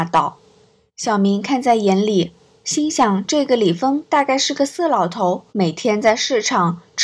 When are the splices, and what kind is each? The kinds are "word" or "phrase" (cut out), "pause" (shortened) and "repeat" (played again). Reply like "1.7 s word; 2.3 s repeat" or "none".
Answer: 5.5 s pause